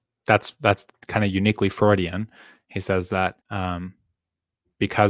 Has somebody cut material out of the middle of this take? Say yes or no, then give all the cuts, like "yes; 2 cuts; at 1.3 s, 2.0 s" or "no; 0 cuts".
yes; 1 cut; at 3.4 s